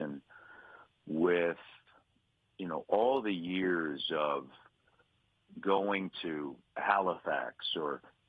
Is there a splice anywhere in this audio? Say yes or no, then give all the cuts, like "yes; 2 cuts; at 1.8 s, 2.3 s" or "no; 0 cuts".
no; 0 cuts